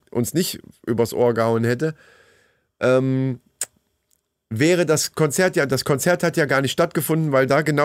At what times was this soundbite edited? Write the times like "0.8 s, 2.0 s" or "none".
none